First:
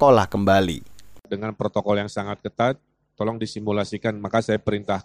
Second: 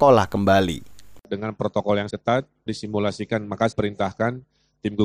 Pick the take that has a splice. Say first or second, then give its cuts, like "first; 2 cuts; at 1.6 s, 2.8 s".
second; 3 cuts; at 2.1 s, 2.7 s, 3.7 s